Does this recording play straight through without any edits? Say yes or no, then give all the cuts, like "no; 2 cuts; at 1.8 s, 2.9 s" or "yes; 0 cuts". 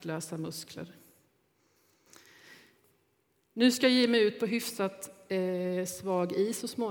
yes; 0 cuts